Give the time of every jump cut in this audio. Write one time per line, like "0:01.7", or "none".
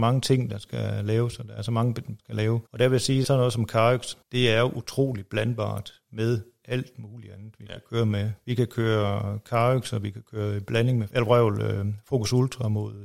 0:02.2
0:02.7
0:03.2
0:04.2
0:11.1